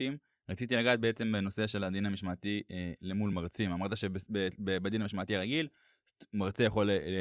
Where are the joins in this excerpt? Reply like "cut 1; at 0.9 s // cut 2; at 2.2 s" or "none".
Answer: none